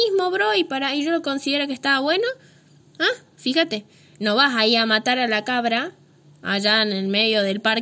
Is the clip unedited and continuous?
yes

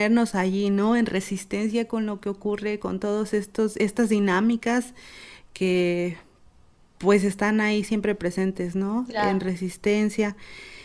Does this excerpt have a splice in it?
no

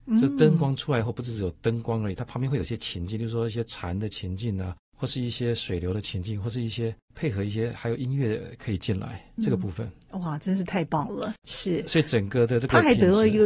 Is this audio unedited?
no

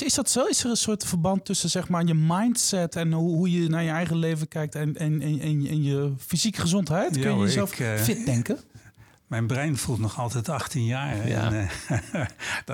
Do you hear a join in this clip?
no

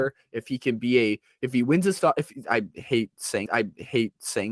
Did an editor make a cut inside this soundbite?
yes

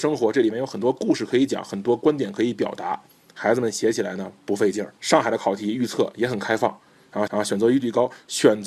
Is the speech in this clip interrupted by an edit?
yes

